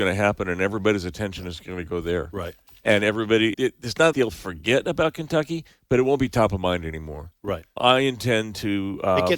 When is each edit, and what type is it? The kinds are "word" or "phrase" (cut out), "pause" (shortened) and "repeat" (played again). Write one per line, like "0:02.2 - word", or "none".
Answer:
0:03.5 - word
0:04.1 - word
0:07.8 - word